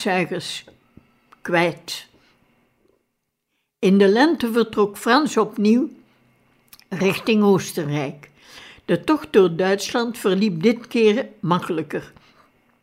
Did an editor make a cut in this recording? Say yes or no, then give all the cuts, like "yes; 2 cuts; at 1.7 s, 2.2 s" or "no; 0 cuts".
no; 0 cuts